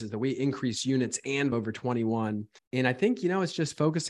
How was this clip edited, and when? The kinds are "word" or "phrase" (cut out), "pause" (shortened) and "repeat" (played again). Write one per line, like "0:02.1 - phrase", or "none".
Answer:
0:01.5 - word
0:02.6 - pause